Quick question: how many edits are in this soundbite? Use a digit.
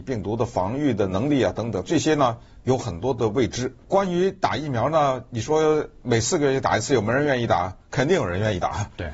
2